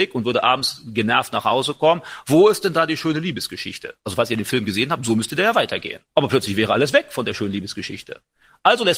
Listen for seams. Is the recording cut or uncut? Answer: cut